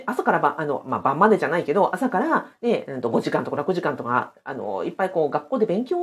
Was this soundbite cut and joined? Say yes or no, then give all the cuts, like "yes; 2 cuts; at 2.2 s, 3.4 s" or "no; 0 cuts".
no; 0 cuts